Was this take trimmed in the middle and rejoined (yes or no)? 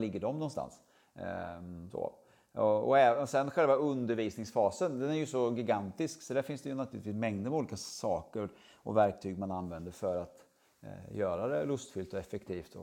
no